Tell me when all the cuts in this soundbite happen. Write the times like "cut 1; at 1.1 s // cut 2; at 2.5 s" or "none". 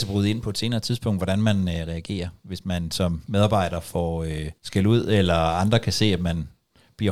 cut 1; at 4.6 s